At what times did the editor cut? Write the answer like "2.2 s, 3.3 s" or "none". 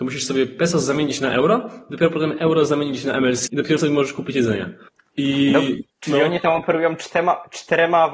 3.5 s, 3.8 s, 4.9 s, 5.9 s